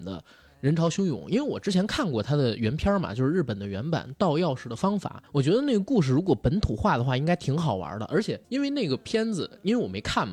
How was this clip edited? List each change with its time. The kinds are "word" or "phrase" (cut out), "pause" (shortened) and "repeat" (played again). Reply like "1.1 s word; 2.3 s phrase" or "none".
5.3 s pause; 8.4 s pause